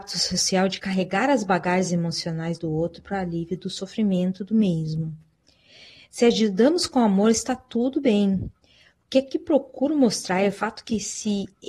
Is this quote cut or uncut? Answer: uncut